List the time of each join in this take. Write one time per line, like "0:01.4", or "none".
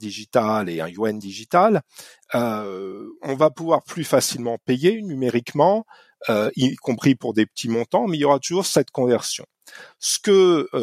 none

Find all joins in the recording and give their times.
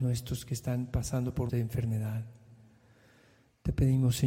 0:01.5

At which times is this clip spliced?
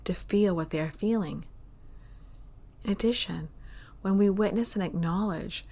none

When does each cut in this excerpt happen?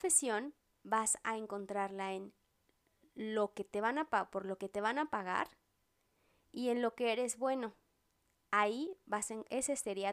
none

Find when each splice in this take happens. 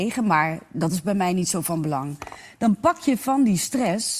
none

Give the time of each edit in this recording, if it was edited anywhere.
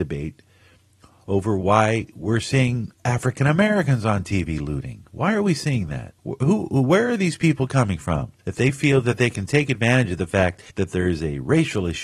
0:02.9
0:06.2
0:08.4
0:10.7

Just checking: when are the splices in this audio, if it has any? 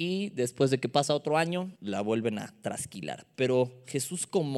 0:01.8

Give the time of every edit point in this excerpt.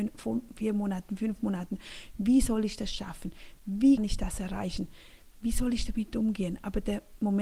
0:04.0

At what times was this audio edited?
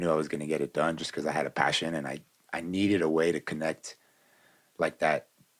none

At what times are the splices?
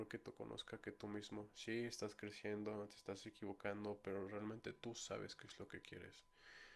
none

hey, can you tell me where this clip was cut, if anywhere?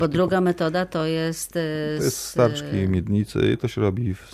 none

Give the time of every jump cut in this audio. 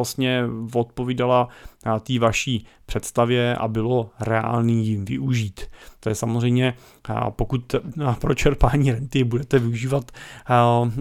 none

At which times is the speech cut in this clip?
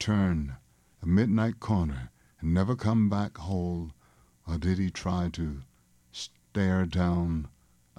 none

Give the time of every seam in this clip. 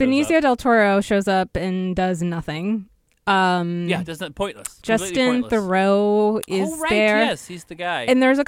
none

